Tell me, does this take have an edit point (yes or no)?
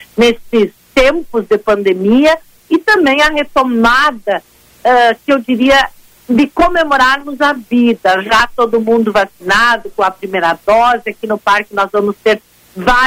no